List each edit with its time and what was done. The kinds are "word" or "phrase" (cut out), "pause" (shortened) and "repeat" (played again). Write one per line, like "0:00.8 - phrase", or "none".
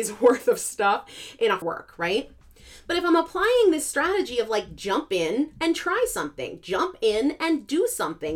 0:01.6 - phrase